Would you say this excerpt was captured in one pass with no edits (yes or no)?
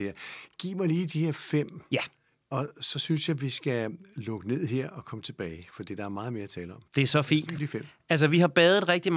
no